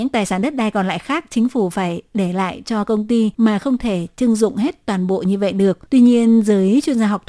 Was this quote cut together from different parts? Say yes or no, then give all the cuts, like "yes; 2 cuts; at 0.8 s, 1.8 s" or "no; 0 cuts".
yes; 2 cuts; at 3.3 s, 5.9 s